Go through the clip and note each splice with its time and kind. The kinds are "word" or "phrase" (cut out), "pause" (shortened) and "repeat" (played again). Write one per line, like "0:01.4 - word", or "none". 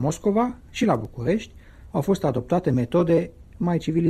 0:01.9 - pause